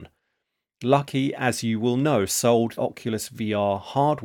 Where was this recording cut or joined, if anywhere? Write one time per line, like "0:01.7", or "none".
0:02.8